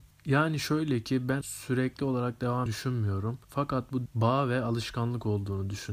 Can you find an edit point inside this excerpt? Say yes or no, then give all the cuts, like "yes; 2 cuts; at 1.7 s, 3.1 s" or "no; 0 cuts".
yes; 4 cuts; at 1.4 s, 2.7 s, 3.4 s, 4.1 s